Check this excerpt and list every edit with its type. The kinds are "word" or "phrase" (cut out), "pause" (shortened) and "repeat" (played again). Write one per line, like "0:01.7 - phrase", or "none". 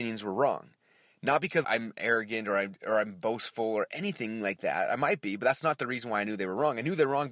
0:01.6 - word